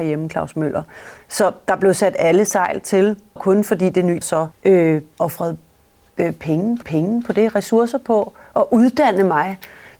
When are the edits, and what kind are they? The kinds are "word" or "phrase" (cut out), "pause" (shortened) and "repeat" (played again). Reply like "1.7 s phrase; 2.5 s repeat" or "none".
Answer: 3.4 s phrase; 4.2 s word; 4.5 s pause; 6.8 s repeat